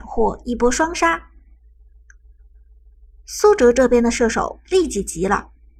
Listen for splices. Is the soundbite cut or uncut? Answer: uncut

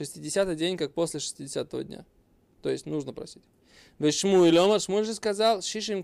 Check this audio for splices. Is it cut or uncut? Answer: uncut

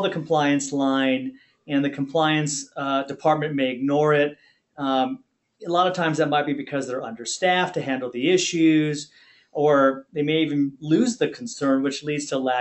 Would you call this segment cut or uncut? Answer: uncut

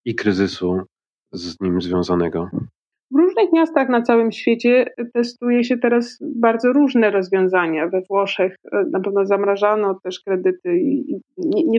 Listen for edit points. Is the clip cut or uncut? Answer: uncut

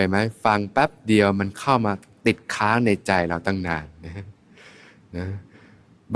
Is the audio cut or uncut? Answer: uncut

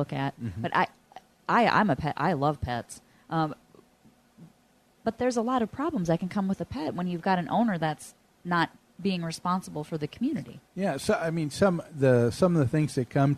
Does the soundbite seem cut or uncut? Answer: uncut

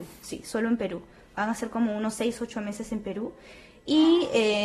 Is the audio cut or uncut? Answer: uncut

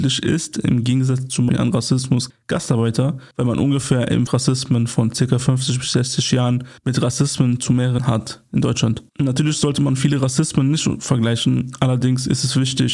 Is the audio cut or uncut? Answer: cut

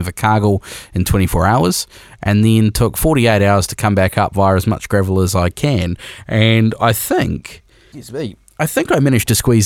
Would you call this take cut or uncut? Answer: uncut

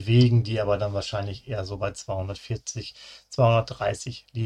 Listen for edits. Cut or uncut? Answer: uncut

